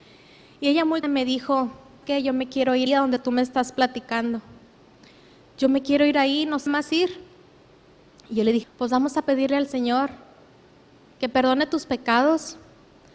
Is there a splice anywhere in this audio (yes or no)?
yes